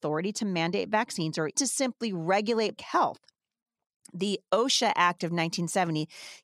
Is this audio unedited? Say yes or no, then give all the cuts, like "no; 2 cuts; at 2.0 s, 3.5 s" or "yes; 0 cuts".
no; 2 cuts; at 1.5 s, 2.8 s